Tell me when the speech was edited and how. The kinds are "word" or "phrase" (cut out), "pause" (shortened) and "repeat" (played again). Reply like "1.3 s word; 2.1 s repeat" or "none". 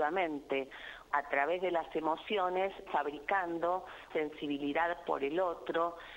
1.1 s word; 2.9 s word; 4.1 s word

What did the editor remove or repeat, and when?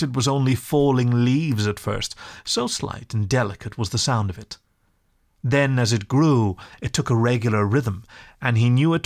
none

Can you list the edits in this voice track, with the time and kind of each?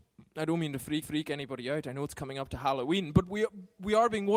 1.0 s repeat

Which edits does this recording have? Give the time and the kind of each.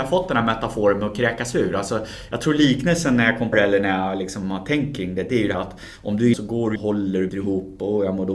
3.5 s word; 5.5 s word; 6.3 s word; 6.8 s word; 7.3 s word

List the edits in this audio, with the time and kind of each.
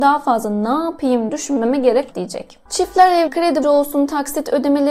1.3 s word; 2.1 s word; 3.3 s word; 3.6 s word

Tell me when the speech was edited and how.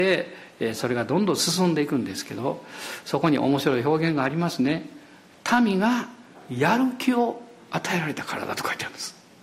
none

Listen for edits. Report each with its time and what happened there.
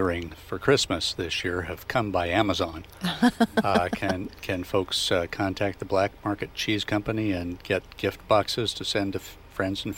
none

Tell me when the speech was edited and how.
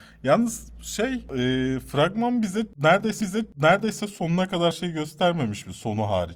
3.2 s repeat; 4.7 s word

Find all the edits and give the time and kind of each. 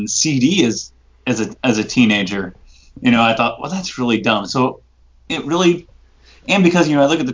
none

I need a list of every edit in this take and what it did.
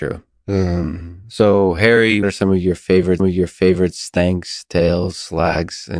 2.2 s word; 3.2 s repeat

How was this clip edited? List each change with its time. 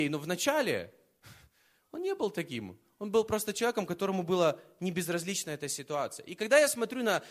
none

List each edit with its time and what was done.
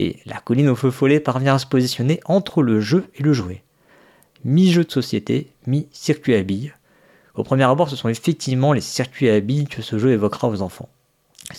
none

